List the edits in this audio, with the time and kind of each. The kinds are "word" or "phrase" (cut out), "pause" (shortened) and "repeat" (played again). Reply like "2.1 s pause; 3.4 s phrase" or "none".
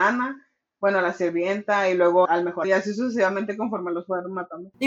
2.3 s word; 2.6 s word

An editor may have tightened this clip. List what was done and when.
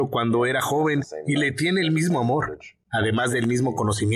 none

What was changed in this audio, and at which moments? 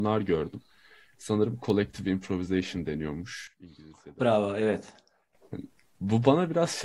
none

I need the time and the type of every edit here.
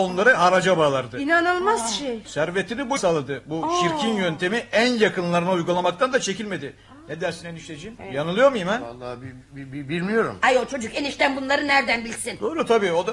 3.0 s word

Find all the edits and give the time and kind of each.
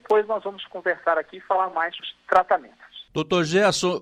2.0 s word

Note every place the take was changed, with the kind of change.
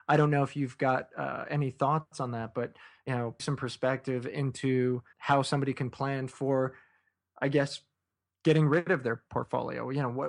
3.4 s word; 5.1 s word

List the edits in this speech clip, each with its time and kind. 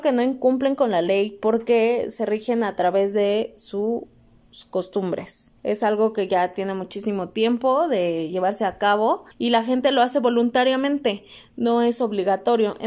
5.6 s pause; 9.3 s pause

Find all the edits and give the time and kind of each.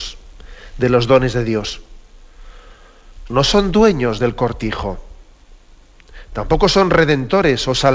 none

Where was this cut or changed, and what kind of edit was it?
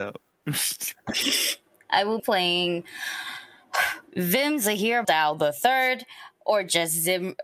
2.2 s word; 4.1 s pause; 5.0 s phrase

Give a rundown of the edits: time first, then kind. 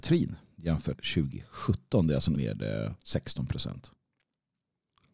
0.9 s word; 2.4 s word

